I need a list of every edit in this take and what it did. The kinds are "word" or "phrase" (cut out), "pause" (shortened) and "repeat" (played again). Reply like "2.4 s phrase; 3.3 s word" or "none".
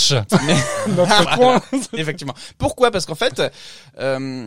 1.2 s word